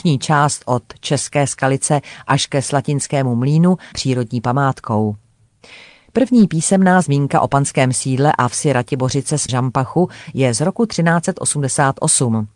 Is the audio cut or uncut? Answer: cut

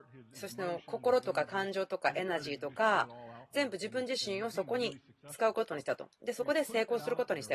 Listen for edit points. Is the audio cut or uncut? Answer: uncut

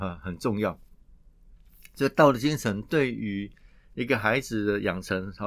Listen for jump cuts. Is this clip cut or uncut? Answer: uncut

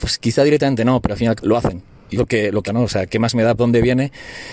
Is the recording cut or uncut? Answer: cut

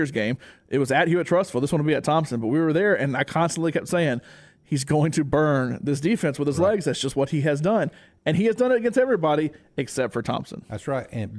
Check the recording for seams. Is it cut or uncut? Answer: uncut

